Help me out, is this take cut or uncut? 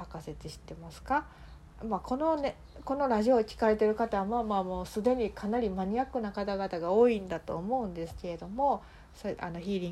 uncut